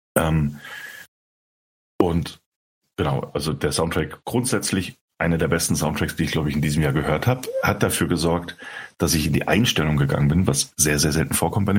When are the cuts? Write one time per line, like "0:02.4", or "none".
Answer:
none